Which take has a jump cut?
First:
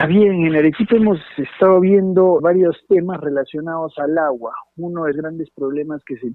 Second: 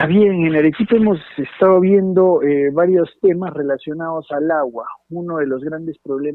first; 2 cuts; at 2.4 s, 5.1 s

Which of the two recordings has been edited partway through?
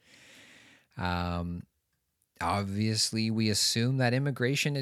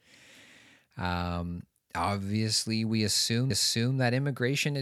second; 2 cuts; at 1.7 s, 3.5 s

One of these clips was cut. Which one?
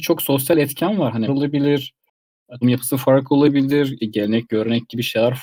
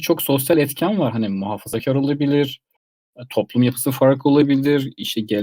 first; 3 cuts; at 1.3 s, 2.6 s, 4.0 s

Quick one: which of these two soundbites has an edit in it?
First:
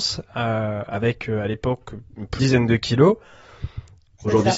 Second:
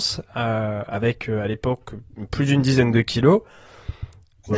first; 1 cut; at 2.4 s

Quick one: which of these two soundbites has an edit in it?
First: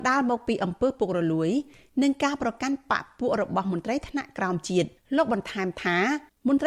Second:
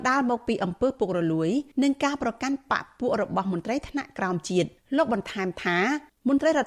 second; 1 cut; at 1.7 s

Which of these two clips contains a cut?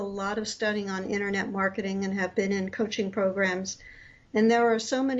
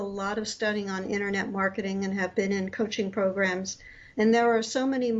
second; 1 cut; at 4.1 s

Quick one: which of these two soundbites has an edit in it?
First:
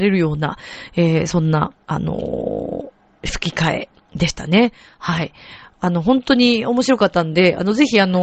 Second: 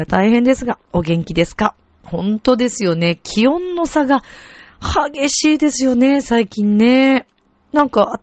first; 2 cuts; at 1.8 s, 3.1 s

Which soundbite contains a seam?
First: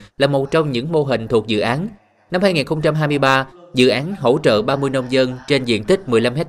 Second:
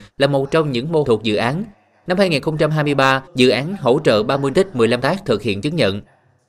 second; 4 cuts; at 1.0 s, 3.3 s, 4.5 s, 5.0 s

